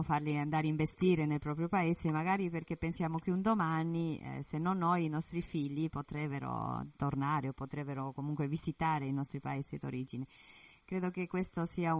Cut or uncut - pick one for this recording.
uncut